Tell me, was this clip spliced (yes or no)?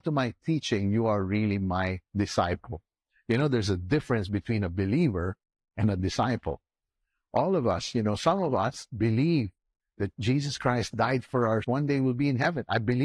yes